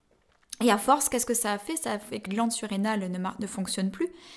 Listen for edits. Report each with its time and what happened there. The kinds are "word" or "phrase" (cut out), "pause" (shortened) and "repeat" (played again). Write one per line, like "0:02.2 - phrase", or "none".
0:02.3 - word